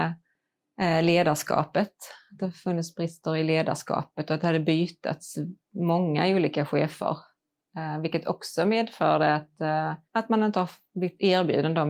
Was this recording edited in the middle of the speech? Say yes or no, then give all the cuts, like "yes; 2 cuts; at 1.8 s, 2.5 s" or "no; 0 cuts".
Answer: yes; 1 cut; at 10.0 s